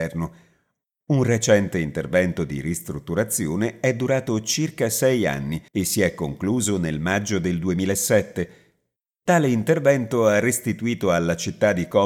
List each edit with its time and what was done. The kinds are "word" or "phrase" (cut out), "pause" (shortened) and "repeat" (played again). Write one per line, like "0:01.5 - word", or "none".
0:05.7 - pause